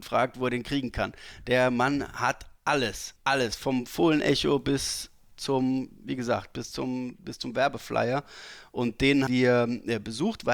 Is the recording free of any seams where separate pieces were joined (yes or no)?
no